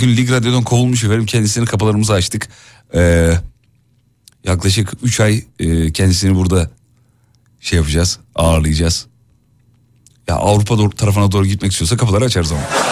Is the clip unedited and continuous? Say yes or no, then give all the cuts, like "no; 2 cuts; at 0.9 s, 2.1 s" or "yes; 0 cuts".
yes; 0 cuts